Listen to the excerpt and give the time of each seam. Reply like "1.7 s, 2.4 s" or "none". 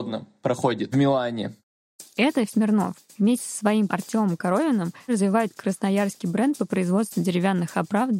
0.9 s, 2.5 s, 3.9 s, 5.1 s